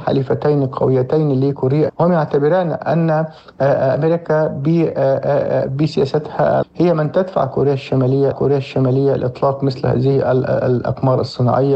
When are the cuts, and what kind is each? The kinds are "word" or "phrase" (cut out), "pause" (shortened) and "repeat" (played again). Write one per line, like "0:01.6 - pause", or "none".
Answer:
0:01.9 - word
0:06.6 - word
0:08.3 - repeat